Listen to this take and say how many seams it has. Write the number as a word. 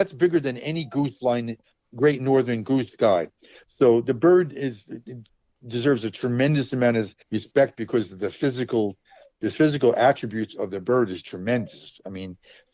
four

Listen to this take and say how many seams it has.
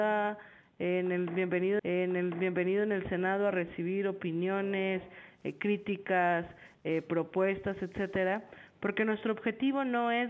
one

